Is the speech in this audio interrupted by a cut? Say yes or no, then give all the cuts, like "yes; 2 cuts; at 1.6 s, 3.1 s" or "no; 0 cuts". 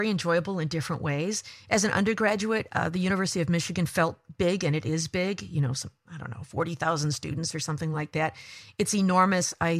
no; 0 cuts